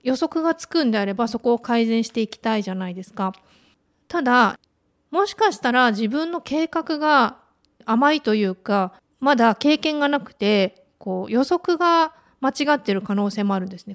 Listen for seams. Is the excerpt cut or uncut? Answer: uncut